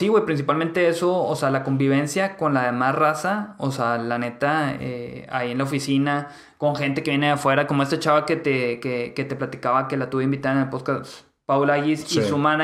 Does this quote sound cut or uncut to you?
uncut